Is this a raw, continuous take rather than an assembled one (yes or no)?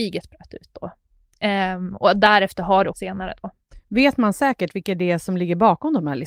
no